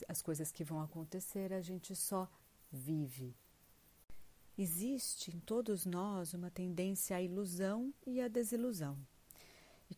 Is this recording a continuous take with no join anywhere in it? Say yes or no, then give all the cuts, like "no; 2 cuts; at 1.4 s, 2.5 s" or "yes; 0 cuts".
yes; 0 cuts